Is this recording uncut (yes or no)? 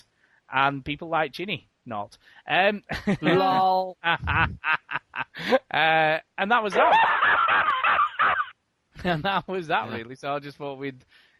no